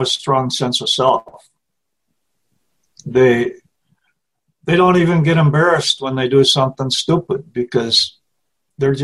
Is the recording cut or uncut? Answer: uncut